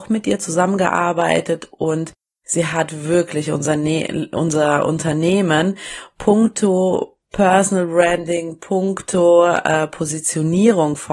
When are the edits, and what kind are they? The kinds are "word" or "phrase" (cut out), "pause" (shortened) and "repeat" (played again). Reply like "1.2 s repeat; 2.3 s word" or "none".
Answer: none